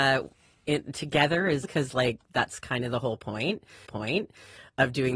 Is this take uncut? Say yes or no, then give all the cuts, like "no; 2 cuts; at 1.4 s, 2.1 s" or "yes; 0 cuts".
no; 2 cuts; at 1.6 s, 3.9 s